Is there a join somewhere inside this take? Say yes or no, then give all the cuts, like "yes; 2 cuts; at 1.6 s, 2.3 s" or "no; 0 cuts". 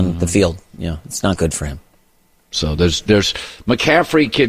no; 0 cuts